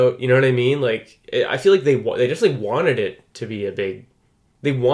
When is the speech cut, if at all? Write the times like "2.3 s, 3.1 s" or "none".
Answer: none